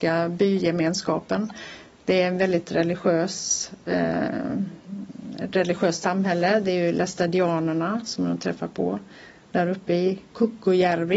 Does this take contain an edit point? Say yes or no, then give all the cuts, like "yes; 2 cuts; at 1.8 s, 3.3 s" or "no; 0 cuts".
no; 0 cuts